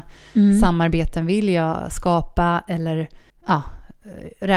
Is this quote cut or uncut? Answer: cut